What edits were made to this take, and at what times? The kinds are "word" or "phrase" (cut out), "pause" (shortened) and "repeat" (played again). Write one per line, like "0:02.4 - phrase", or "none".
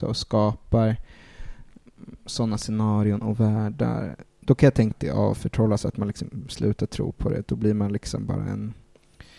0:04.3 - pause
0:04.9 - word